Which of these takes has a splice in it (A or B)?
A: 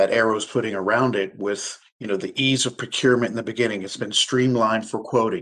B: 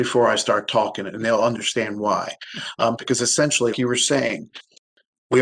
B